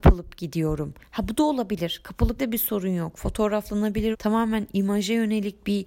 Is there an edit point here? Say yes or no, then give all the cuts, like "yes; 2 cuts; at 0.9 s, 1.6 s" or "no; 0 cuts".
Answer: yes; 2 cuts; at 2.4 s, 4.1 s